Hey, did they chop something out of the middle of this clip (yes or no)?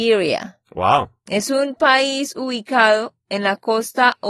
no